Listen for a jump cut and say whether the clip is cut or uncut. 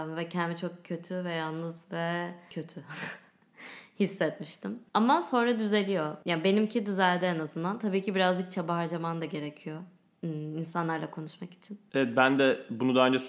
uncut